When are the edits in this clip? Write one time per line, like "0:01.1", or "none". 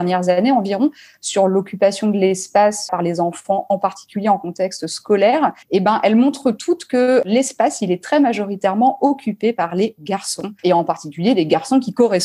0:05.6
0:10.6